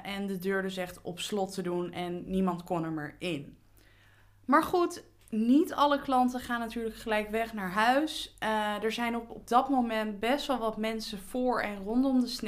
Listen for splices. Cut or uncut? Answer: uncut